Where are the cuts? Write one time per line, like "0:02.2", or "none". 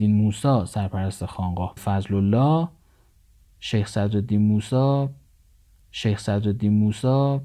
0:01.8
0:05.8